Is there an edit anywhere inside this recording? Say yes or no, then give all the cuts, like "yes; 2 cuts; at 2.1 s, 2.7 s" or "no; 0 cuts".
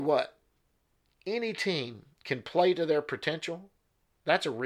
yes; 1 cut; at 2.1 s